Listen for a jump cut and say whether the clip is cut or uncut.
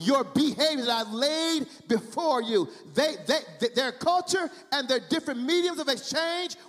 uncut